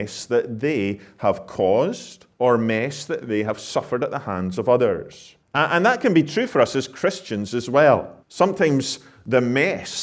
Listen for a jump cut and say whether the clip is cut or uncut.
cut